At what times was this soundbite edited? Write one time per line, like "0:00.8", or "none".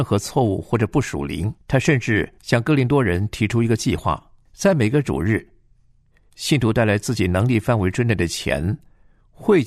0:01.6
0:02.4
0:04.5